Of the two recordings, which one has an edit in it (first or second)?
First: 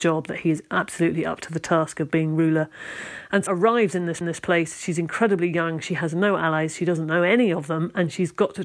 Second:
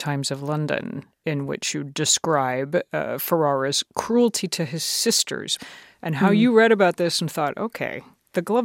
first